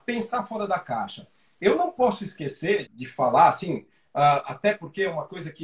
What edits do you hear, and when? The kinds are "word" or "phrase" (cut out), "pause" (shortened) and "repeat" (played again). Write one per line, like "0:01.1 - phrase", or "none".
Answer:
0:02.9 - word